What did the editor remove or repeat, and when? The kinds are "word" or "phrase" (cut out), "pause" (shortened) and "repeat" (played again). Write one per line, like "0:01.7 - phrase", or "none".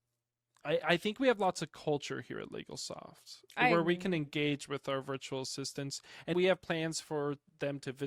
0:06.3 - word

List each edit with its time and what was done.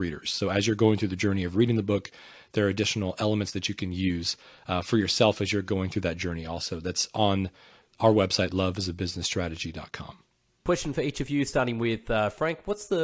none

